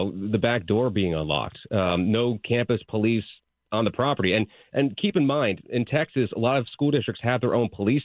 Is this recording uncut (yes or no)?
yes